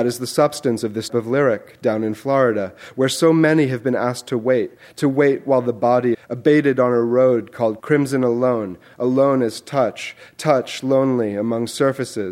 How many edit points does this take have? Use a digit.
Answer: 4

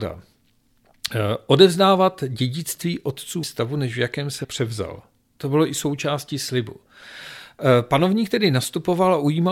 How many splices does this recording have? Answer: 2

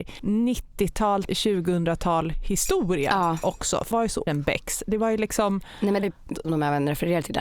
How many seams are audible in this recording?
5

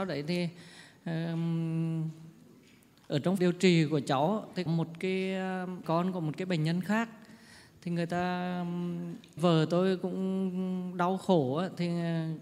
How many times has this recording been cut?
4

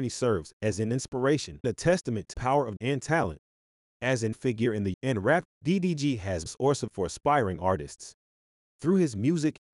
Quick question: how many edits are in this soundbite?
8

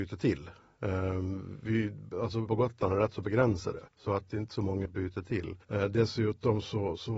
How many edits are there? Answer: 5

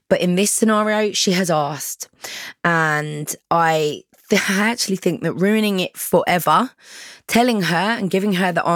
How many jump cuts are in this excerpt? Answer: 0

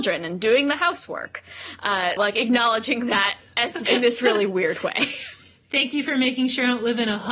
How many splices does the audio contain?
2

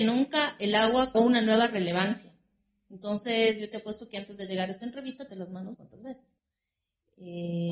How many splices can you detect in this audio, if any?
3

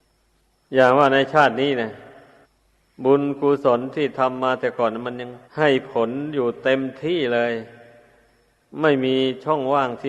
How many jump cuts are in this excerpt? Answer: 2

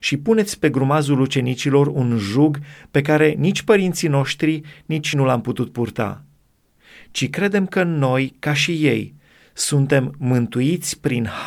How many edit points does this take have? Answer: 1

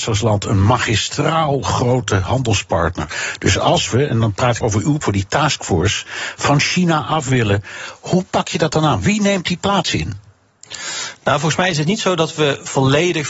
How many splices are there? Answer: 2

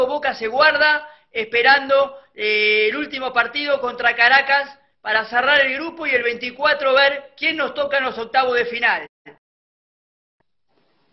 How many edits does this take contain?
0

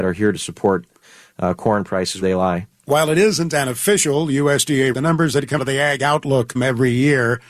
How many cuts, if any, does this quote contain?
4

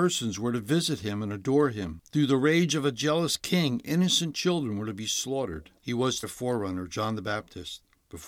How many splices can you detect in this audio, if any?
2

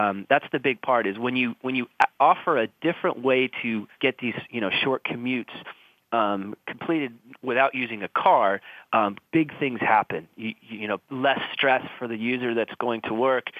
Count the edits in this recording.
3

